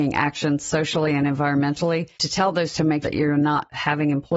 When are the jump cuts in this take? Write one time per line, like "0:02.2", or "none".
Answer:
0:02.1
0:02.7
0:03.0